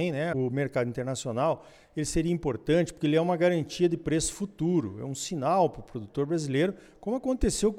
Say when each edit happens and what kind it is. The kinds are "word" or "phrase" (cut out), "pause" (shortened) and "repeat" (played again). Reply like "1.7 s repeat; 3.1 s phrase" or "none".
none